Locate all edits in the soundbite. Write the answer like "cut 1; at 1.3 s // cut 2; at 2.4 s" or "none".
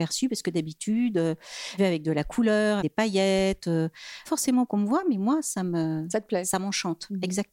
cut 1; at 1.8 s // cut 2; at 2.8 s // cut 3; at 4.2 s // cut 4; at 4.7 s